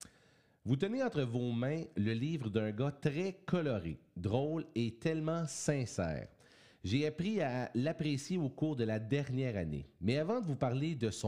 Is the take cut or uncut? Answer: uncut